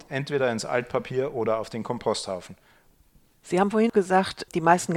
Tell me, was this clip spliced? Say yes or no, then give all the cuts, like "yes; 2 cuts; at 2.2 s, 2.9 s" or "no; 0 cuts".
no; 0 cuts